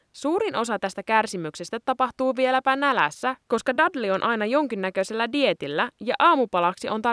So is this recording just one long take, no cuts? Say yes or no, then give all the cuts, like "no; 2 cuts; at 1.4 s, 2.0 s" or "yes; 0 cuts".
yes; 0 cuts